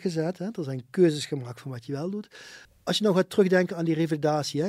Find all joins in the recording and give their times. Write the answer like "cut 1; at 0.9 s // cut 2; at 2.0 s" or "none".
cut 1; at 2.6 s

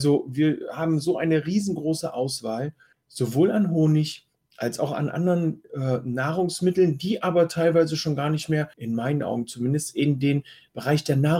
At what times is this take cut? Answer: cut 1; at 8.7 s

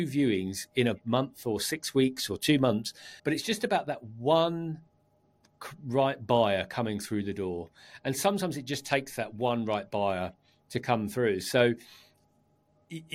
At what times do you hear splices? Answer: cut 1; at 3.2 s

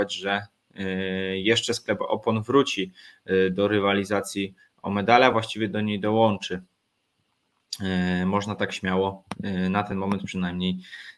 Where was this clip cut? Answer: none

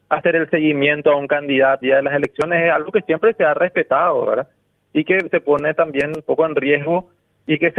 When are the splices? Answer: cut 1; at 1.8 s // cut 2; at 5.3 s

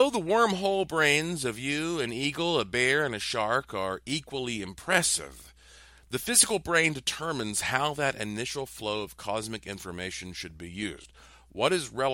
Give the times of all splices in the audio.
none

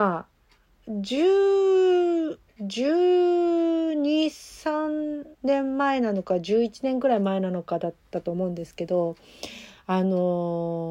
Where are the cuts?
cut 1; at 2.5 s // cut 2; at 5.3 s

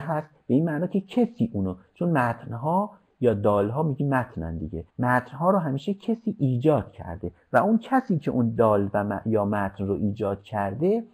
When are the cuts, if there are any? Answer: cut 1; at 4.9 s

